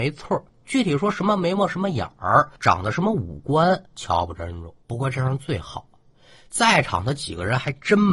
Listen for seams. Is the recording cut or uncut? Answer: cut